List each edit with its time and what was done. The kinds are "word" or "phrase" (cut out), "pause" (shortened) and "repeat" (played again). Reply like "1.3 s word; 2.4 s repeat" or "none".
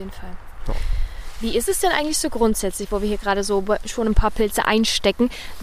none